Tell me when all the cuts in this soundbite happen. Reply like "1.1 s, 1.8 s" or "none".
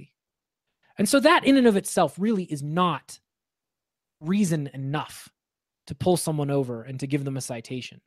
none